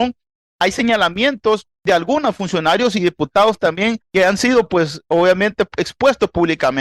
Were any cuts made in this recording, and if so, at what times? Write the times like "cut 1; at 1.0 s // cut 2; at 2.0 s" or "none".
cut 1; at 1.7 s // cut 2; at 4.0 s